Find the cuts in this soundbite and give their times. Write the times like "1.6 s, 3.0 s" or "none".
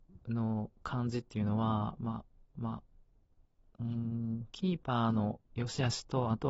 2.5 s, 5.4 s